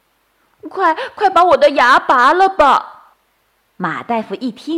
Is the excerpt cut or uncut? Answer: cut